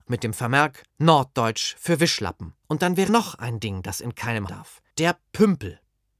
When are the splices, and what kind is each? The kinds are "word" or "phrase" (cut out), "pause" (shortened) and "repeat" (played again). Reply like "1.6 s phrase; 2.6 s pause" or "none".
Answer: 0.9 s pause; 2.6 s pause; 3.1 s word; 4.5 s phrase; 4.9 s pause